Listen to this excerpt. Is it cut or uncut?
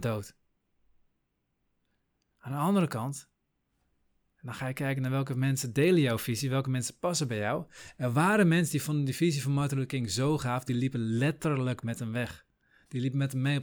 uncut